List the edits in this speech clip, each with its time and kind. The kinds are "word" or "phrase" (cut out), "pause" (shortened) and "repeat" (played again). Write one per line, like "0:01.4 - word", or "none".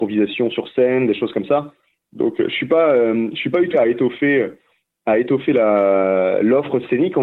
0:03.7 - word